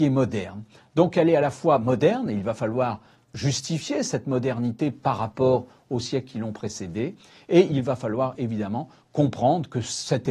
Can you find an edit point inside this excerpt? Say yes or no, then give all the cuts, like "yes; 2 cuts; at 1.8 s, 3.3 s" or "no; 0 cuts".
no; 0 cuts